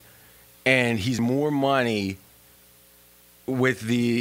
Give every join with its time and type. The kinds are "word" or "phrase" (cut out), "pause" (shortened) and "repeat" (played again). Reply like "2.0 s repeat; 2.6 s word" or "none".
1.2 s word